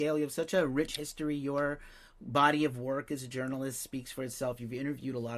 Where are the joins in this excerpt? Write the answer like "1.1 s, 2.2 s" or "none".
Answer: none